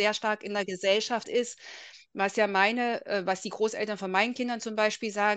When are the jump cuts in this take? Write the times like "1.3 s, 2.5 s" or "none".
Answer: 1.2 s